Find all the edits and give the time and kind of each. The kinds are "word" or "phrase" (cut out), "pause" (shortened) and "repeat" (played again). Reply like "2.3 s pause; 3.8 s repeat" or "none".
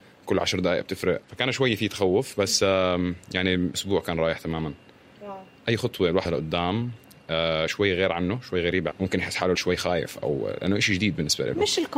1.2 s pause; 3.7 s word; 6.2 s word; 8.9 s word; 9.5 s word